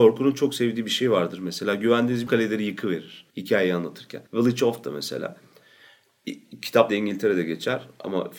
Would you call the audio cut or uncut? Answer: cut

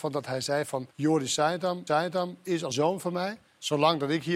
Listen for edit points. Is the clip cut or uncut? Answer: cut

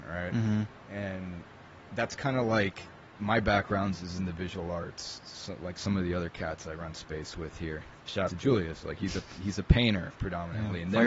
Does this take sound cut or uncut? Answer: cut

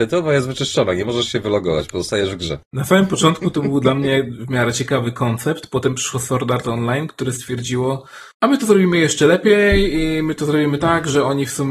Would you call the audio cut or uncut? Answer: cut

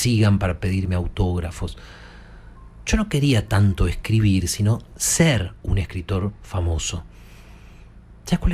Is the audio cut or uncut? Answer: uncut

